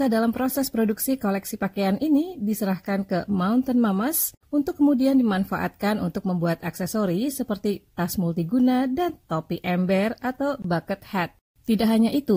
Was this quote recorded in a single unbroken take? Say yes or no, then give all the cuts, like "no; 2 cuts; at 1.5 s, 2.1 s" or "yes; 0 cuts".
yes; 0 cuts